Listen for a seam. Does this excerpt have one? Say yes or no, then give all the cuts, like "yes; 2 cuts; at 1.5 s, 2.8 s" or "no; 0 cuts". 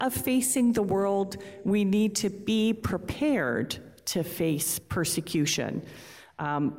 no; 0 cuts